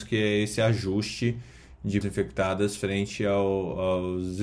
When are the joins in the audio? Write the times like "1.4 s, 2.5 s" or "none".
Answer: 2.0 s